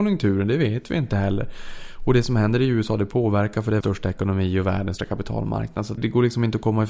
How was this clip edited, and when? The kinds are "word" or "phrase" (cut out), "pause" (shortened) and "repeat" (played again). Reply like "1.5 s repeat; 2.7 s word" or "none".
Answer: 3.8 s word; 5.0 s word; 6.0 s word

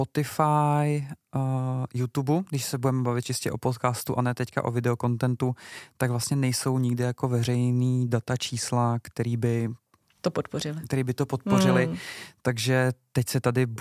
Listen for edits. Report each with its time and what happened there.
none

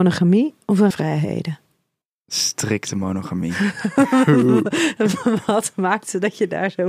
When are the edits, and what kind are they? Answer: 0.9 s phrase

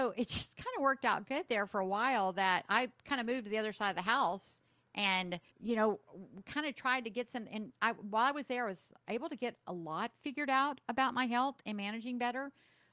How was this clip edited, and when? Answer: 5.5 s pause

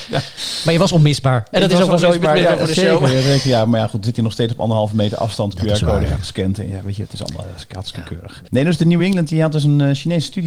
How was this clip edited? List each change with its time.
none

